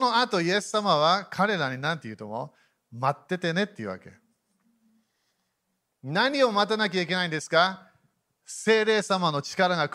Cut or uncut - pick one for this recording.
cut